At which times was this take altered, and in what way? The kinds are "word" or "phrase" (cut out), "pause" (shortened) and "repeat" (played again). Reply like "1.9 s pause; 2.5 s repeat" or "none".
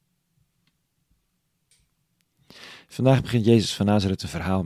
none